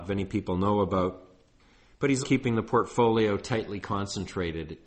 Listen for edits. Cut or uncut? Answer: cut